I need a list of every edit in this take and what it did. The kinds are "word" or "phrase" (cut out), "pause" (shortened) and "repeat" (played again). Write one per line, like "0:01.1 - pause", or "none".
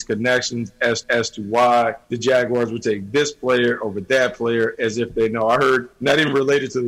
0:01.0 - repeat
0:02.0 - pause
0:05.9 - pause